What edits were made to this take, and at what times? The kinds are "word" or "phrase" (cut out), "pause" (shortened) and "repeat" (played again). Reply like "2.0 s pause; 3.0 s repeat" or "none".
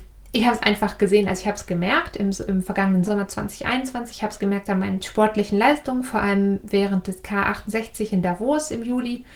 3.0 s word; 5.0 s word